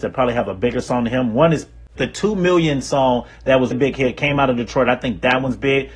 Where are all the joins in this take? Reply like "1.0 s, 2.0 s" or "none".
2.0 s, 3.7 s